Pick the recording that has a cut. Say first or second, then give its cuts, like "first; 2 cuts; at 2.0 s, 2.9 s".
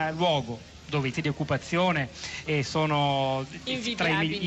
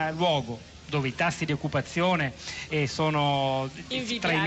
first; 1 cut; at 1.1 s